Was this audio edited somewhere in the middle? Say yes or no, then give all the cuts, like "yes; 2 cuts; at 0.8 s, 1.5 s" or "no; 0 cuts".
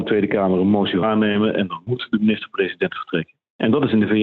yes; 1 cut; at 1.0 s